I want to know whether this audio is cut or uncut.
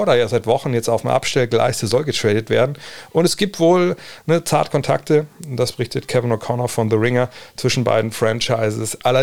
uncut